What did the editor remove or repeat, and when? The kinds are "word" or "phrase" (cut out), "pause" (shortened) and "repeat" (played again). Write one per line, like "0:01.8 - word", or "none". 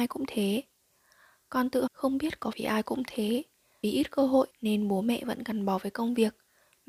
0:01.9 - word
0:02.5 - word
0:03.8 - phrase
0:04.5 - pause